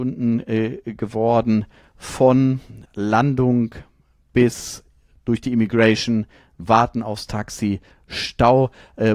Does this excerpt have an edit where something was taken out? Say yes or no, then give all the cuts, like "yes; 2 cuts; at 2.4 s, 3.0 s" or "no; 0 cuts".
yes; 1 cut; at 2.9 s